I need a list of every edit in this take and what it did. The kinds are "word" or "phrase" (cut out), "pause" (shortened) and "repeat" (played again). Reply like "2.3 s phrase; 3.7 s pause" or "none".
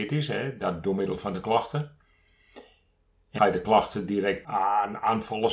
3.4 s phrase